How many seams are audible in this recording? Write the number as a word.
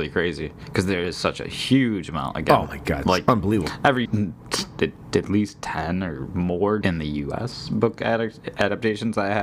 two